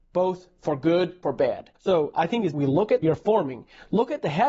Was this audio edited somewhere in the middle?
yes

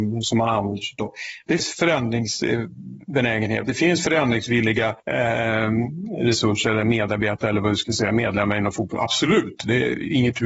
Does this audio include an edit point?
yes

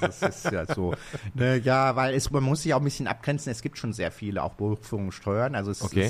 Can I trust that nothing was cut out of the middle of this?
yes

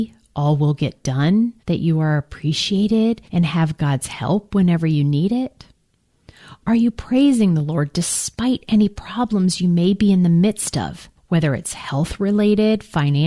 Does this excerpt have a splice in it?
yes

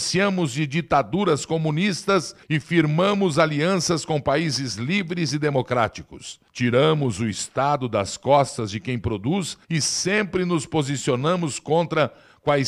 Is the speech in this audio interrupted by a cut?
yes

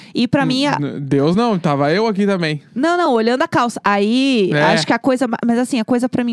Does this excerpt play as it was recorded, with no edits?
yes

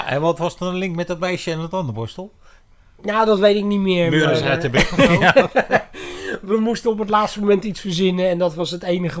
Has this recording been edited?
no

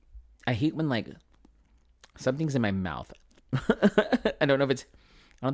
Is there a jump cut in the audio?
no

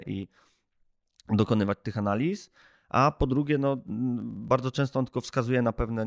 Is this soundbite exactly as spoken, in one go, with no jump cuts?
yes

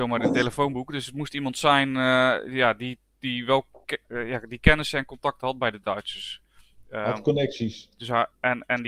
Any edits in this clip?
no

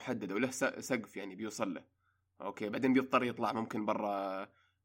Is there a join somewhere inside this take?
no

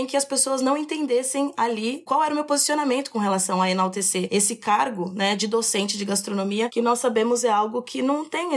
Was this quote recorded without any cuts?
yes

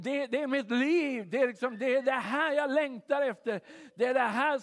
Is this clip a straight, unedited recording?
yes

